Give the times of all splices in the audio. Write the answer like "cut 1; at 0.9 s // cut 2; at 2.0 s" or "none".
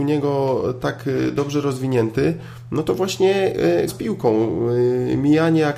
cut 1; at 3.9 s

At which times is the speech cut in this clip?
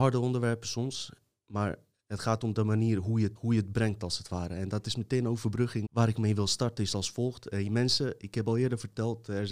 cut 1; at 3.3 s // cut 2; at 5.8 s

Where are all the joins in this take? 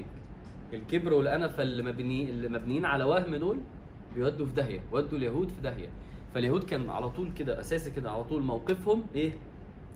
none

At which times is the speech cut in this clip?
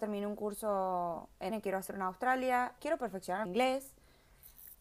cut 1; at 1.5 s // cut 2; at 1.9 s // cut 3; at 2.8 s // cut 4; at 3.5 s

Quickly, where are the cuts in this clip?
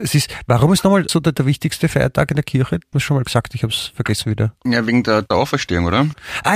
cut 1; at 1.1 s // cut 2; at 2.9 s // cut 3; at 5.3 s

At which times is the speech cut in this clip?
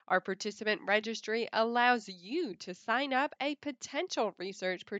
cut 1; at 3.4 s

